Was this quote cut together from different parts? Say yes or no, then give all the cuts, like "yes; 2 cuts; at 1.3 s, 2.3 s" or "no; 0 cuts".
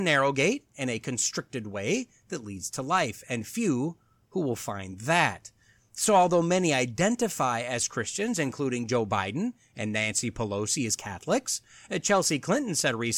no; 0 cuts